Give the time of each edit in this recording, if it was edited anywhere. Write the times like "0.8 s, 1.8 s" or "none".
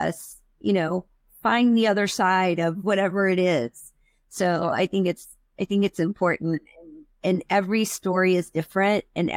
none